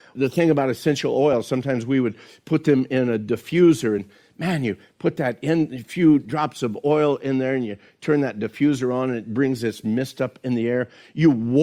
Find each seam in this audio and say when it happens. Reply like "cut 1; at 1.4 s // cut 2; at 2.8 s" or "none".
none